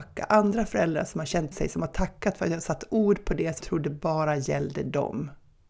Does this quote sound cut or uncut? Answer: cut